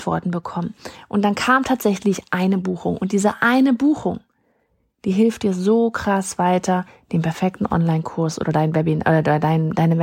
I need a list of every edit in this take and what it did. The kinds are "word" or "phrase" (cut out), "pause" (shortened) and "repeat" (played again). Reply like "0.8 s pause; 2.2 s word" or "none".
none

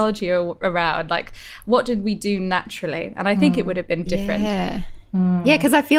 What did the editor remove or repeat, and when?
4.1 s word

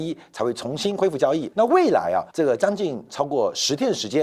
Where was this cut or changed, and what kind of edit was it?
1.5 s pause; 2.3 s pause

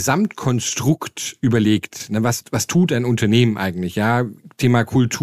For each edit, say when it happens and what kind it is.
2.4 s word

